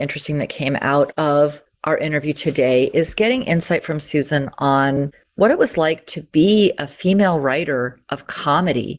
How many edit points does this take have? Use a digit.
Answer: 0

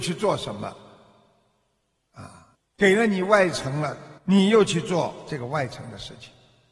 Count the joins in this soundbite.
2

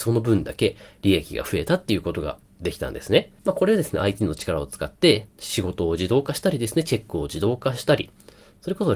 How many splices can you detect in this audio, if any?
2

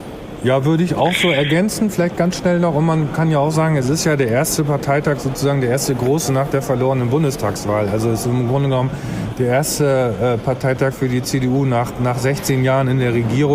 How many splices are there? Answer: 0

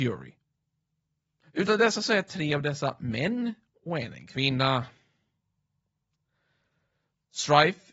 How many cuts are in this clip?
0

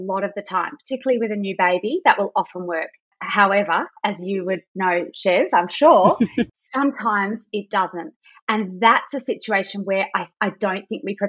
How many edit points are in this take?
0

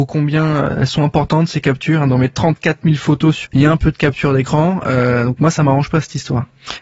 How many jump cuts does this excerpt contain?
1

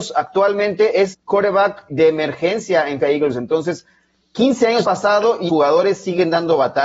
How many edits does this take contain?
5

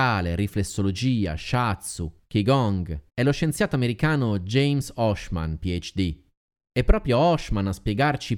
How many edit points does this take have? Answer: 1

